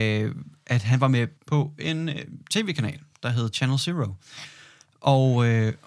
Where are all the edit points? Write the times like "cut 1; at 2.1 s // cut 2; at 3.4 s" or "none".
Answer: cut 1; at 1.4 s